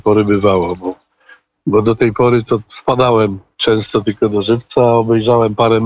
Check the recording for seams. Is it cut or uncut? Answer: uncut